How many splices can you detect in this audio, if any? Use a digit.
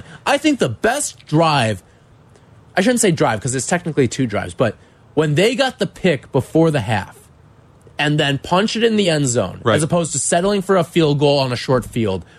0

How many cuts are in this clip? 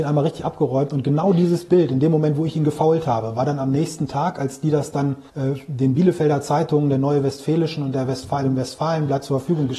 1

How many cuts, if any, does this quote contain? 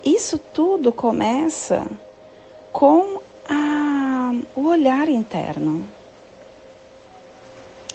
1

